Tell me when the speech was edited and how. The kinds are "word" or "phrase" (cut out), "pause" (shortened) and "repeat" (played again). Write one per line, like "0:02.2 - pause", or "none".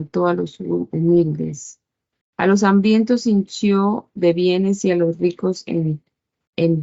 none